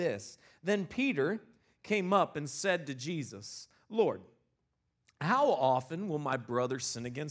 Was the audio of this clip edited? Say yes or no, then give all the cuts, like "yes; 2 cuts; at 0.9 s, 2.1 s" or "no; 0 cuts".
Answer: no; 0 cuts